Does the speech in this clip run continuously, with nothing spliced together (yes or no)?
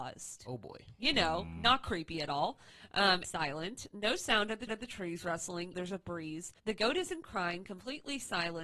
no